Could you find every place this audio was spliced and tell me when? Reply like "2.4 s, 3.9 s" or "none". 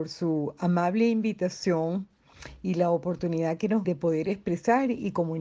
3.8 s